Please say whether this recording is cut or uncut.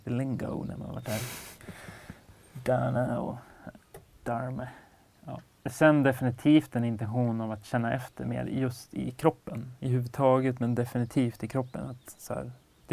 uncut